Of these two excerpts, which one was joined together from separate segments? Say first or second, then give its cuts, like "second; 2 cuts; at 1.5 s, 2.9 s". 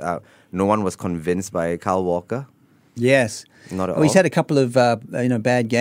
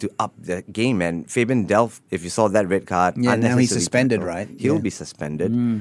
second; 1 cut; at 2.0 s